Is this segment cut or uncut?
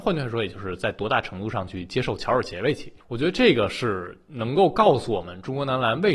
cut